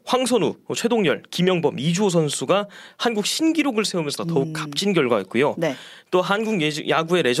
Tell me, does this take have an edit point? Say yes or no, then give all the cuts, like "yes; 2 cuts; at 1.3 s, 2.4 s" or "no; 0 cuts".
yes; 1 cut; at 4.2 s